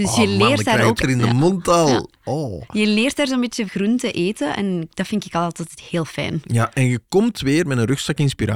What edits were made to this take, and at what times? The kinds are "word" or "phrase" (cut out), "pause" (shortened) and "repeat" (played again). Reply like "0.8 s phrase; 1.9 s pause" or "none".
1.0 s word; 3.7 s word